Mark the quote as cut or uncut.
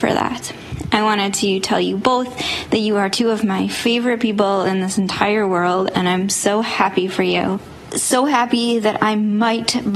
uncut